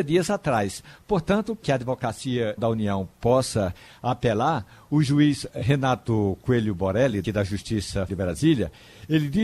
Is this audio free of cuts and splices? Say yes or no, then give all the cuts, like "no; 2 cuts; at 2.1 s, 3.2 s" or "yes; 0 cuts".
no; 5 cuts; at 1.6 s, 2.6 s, 5.5 s, 7.2 s, 8.1 s